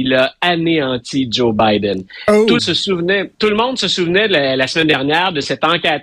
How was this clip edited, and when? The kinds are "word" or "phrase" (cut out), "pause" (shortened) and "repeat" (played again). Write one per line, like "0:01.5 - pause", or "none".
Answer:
0:02.6 - word
0:03.3 - pause